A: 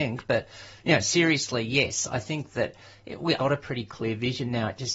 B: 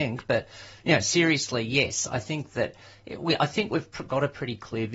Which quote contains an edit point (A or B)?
A